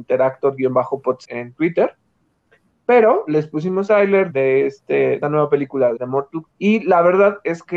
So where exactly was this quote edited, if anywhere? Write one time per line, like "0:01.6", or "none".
0:01.2
0:03.9
0:04.3
0:05.2
0:06.0
0:06.5